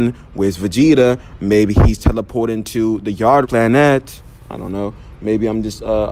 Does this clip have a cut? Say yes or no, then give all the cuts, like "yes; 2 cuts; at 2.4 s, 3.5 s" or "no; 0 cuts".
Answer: yes; 1 cut; at 3.4 s